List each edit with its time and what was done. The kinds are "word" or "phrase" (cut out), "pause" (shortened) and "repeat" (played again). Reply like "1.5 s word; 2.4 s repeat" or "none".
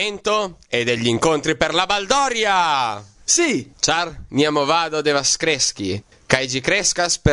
none